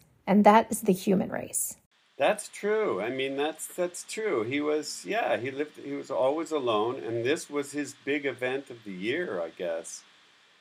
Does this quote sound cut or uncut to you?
uncut